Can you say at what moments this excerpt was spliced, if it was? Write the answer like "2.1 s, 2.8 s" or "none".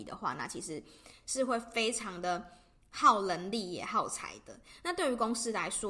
none